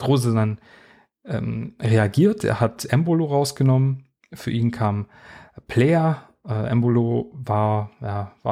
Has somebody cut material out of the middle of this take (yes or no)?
no